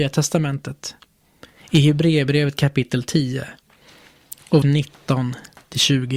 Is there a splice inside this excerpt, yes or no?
yes